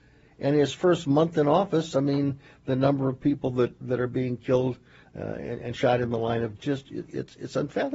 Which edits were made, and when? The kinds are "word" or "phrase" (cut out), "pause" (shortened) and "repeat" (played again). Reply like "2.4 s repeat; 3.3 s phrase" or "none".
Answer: 3.8 s word; 6.6 s phrase